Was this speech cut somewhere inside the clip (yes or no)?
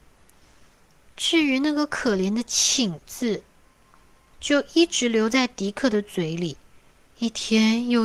no